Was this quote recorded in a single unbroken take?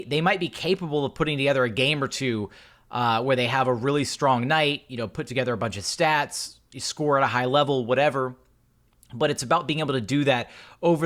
yes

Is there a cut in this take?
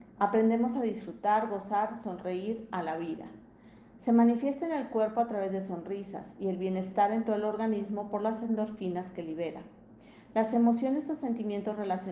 no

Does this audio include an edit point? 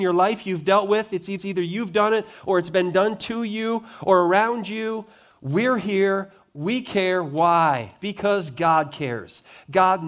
yes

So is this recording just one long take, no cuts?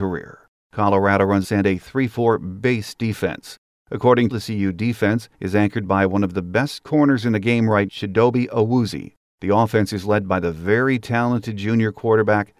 no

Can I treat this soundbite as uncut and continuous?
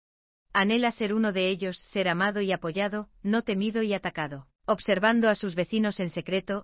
no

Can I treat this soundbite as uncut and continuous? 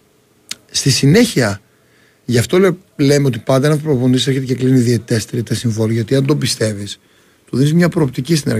yes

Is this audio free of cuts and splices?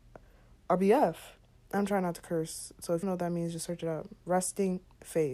no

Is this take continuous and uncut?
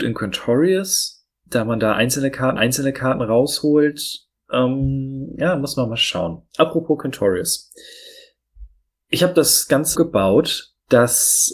no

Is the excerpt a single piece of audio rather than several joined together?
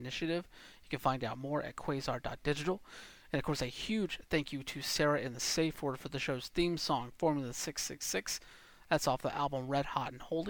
yes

